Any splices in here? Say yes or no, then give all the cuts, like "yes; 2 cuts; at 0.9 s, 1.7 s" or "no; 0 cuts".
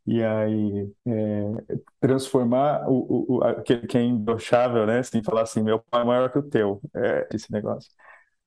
yes; 2 cuts; at 1.0 s, 7.3 s